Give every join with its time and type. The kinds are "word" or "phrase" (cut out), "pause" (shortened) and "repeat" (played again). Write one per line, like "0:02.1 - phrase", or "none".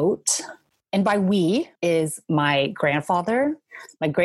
0:01.8 - pause